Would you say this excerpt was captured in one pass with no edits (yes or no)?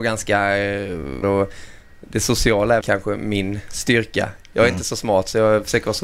no